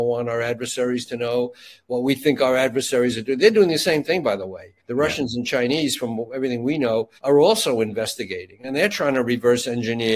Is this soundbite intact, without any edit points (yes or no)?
no